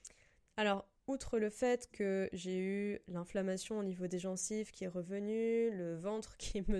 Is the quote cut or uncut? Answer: cut